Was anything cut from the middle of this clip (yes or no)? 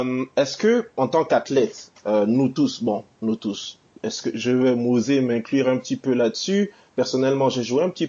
no